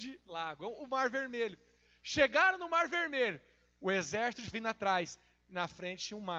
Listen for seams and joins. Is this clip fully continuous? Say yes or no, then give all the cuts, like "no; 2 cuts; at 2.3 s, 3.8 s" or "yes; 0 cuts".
no; 1 cut; at 4.5 s